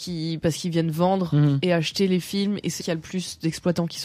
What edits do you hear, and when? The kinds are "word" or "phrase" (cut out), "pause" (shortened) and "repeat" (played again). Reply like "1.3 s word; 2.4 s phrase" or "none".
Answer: 2.8 s word

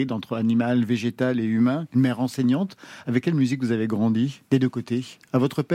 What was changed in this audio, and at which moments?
none

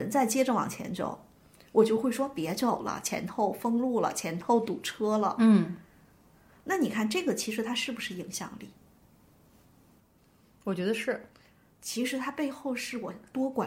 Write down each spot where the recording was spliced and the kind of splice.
none

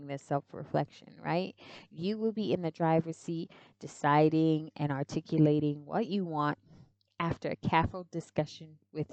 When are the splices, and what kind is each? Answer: none

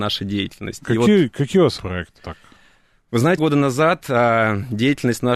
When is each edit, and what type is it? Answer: 1.8 s word; 2.2 s word; 3.4 s word

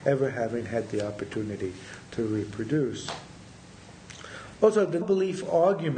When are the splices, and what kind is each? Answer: 5.0 s word

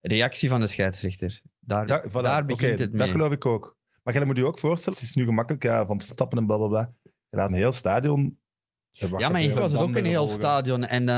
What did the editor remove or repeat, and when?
1.9 s word; 4.9 s word; 6.1 s word; 7.5 s word; 9.5 s word

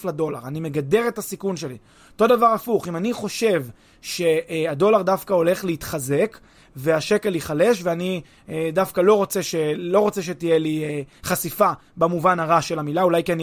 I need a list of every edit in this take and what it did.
none

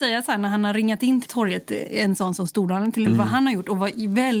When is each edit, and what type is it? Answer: 1.3 s word; 3.1 s word

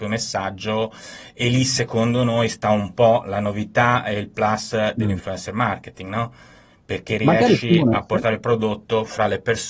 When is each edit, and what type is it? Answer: none

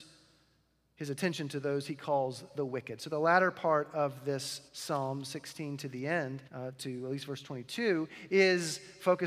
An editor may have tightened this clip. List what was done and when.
4.7 s pause; 6.5 s pause

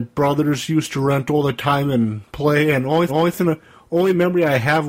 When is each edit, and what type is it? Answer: 3.1 s repeat

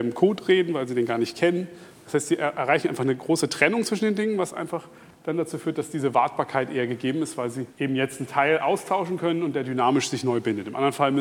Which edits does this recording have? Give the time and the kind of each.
7.7 s pause

